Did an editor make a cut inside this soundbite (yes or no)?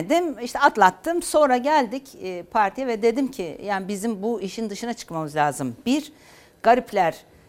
no